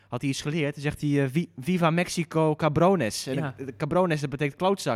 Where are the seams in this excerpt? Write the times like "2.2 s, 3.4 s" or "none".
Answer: none